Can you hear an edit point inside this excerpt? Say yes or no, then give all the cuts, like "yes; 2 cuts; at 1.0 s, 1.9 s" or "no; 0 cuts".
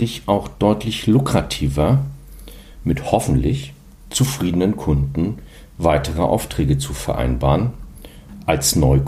no; 0 cuts